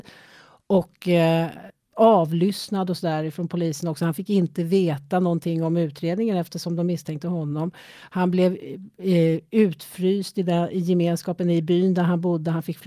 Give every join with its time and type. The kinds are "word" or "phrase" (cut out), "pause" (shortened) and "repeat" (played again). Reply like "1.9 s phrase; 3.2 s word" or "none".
none